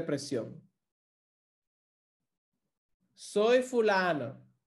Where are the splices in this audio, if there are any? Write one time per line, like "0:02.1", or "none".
none

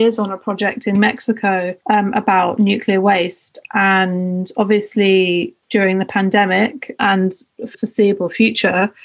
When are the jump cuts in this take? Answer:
0:00.9
0:01.8
0:05.6
0:07.0
0:07.7

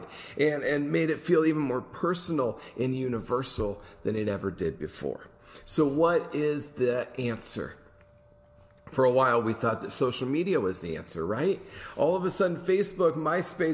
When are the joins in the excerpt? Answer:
none

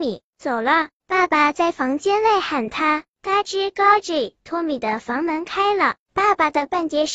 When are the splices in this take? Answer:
none

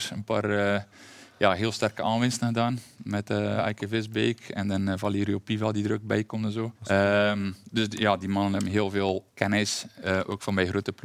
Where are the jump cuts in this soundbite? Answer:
0:06.7
0:09.3

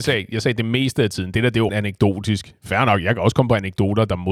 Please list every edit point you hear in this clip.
0:01.7

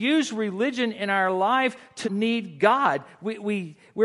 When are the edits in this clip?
0:02.0

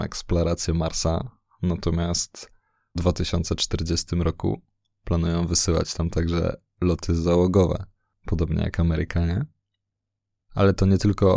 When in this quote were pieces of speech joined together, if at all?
0:03.0

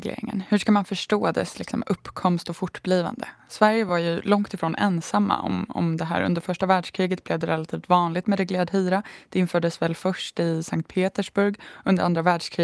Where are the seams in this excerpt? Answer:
none

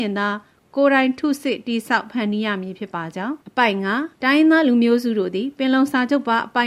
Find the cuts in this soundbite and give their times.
0:03.4
0:04.1

